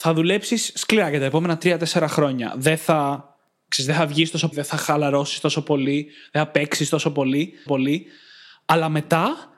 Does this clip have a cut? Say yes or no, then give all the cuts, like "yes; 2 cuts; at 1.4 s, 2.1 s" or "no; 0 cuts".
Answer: yes; 2 cuts; at 4.5 s, 7.7 s